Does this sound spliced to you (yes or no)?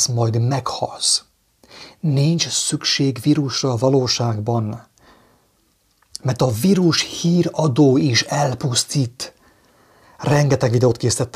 no